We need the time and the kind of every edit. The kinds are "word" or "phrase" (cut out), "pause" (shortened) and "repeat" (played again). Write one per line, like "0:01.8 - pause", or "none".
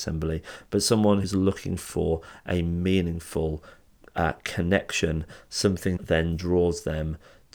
0:01.2 - word
0:06.0 - word